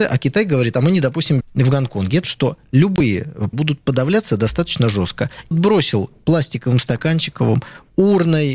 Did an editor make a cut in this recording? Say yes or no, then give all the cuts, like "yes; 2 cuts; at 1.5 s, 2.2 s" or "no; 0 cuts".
yes; 4 cuts; at 1.4 s, 2.2 s, 3.5 s, 5.5 s